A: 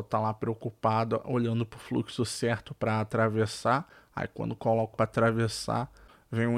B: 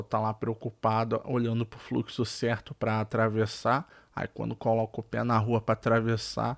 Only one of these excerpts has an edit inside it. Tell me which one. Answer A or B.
A